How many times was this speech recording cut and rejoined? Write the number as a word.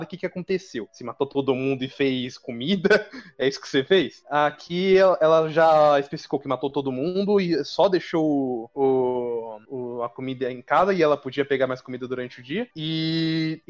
zero